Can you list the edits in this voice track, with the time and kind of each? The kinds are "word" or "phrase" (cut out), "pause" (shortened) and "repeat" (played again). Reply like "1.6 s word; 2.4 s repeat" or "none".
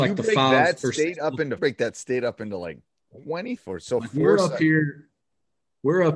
1.6 s phrase; 3.6 s phrase